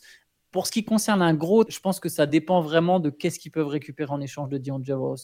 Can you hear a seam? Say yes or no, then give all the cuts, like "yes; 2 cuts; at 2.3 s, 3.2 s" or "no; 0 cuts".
yes; 1 cut; at 1.7 s